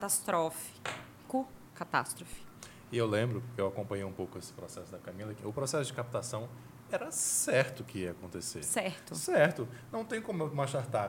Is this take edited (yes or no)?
yes